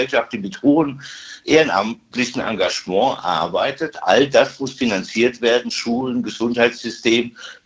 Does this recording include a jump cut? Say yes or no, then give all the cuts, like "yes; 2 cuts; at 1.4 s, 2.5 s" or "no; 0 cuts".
no; 0 cuts